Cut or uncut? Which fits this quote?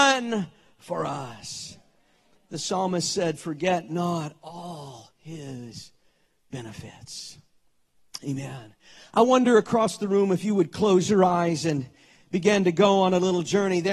uncut